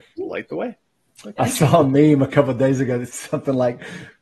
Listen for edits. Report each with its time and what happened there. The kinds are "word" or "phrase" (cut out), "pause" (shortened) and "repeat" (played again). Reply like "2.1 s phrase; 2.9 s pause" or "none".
3.1 s word